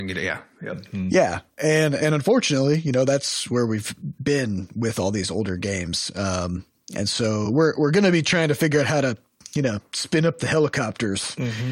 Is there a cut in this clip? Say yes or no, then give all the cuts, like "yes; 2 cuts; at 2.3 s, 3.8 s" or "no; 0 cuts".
no; 0 cuts